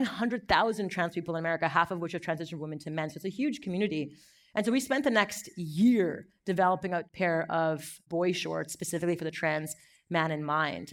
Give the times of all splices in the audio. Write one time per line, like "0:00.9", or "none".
none